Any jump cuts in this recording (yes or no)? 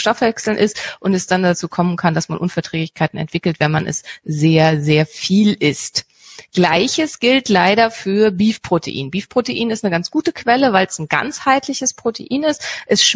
no